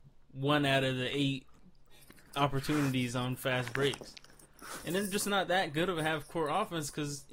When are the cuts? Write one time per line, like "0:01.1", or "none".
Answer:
none